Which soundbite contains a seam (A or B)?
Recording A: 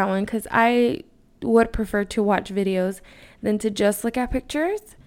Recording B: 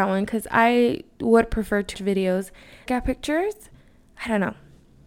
B